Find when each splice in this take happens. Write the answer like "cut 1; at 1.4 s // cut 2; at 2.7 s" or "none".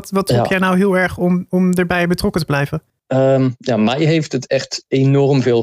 cut 1; at 2.9 s